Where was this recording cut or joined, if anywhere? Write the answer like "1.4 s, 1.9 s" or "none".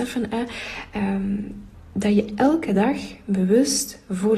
1.7 s